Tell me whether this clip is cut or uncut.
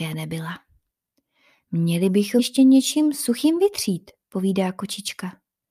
cut